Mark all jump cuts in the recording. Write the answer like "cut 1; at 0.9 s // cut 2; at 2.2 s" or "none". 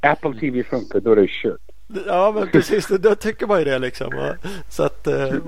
cut 1; at 0.9 s